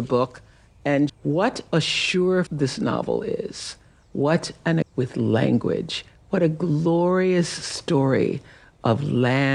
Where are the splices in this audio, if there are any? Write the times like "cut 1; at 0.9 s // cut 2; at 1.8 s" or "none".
cut 1; at 1.1 s // cut 2; at 2.5 s // cut 3; at 4.8 s

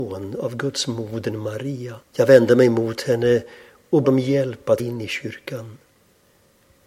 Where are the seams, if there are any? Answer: cut 1; at 2.0 s // cut 2; at 4.0 s // cut 3; at 4.8 s

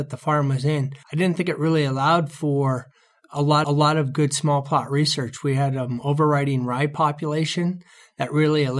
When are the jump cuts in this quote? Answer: cut 1; at 1.0 s // cut 2; at 3.6 s

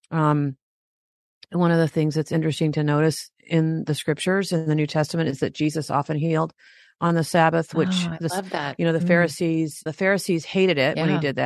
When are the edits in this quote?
cut 1; at 9.9 s

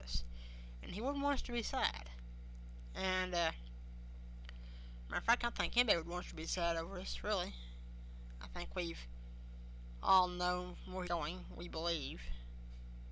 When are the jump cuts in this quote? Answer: cut 1; at 11.0 s

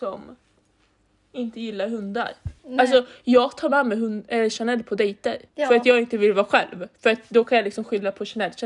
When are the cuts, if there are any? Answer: cut 1; at 2.6 s // cut 2; at 5.5 s

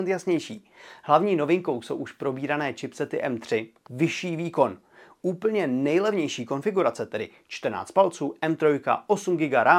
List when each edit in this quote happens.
cut 1; at 3.8 s

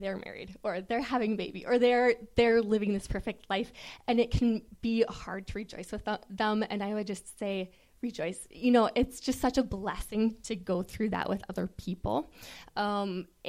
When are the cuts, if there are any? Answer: none

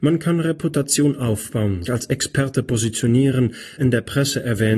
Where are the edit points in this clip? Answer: cut 1; at 1.8 s // cut 2; at 3.8 s

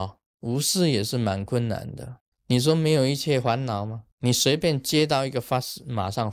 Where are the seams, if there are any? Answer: cut 1; at 2.3 s // cut 2; at 4.1 s

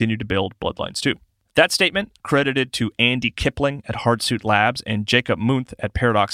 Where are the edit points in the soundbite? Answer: none

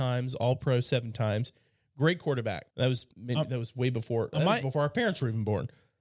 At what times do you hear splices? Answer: cut 1; at 2.7 s // cut 2; at 3.1 s

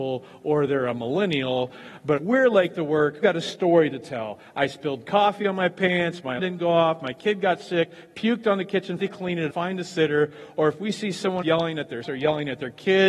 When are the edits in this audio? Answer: cut 1; at 2.2 s // cut 2; at 3.2 s // cut 3; at 6.4 s // cut 4; at 9.0 s // cut 5; at 9.5 s // cut 6; at 11.4 s // cut 7; at 12.0 s

